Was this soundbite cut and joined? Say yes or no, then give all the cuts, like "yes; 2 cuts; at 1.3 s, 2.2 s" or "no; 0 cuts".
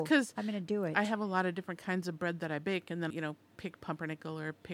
yes; 1 cut; at 3.1 s